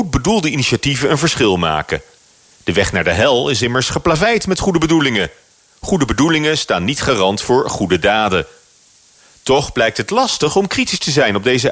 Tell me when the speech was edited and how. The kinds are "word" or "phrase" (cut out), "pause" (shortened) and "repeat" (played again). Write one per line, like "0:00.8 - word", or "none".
none